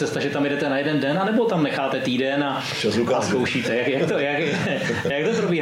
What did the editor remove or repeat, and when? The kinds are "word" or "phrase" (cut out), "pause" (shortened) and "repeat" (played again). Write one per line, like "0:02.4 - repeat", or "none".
none